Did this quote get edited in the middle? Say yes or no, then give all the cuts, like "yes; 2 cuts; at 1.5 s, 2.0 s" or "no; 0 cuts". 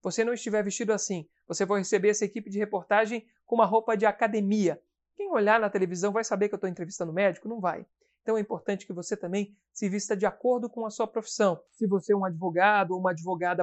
no; 0 cuts